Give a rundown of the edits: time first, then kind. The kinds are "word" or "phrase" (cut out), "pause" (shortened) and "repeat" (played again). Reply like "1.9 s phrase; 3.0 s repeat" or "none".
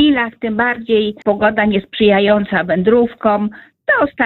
1.2 s phrase